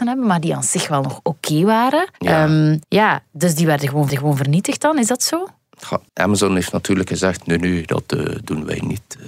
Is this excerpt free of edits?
no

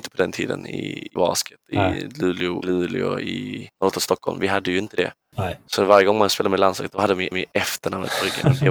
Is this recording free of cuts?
no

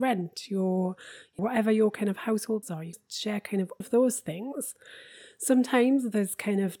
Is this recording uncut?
no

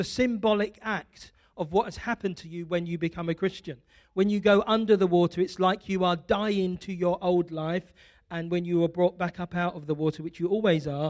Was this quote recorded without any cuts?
yes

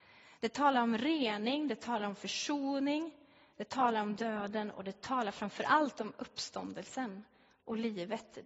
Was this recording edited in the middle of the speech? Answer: no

